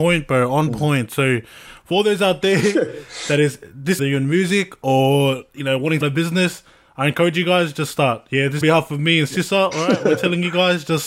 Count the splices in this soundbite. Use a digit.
3